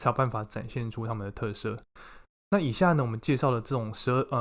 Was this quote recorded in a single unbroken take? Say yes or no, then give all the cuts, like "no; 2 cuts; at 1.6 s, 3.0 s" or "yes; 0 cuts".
yes; 0 cuts